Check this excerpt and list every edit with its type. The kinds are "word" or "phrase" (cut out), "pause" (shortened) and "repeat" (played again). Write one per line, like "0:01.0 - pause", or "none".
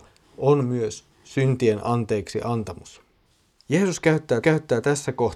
0:03.3 - pause
0:04.4 - repeat